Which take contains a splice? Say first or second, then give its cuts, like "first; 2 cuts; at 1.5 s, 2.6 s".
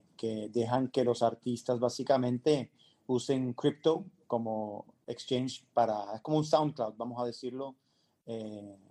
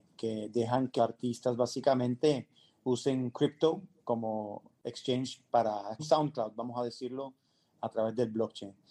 second; 3 cuts; at 1.0 s, 6.0 s, 7.7 s